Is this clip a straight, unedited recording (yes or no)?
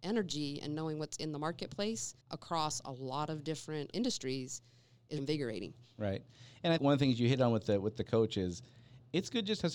no